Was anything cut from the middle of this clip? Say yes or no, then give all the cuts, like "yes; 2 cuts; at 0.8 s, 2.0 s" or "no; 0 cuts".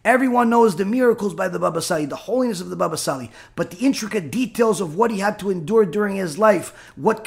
no; 0 cuts